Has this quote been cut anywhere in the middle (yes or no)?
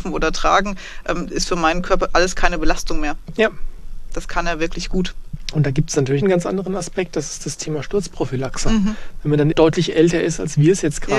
yes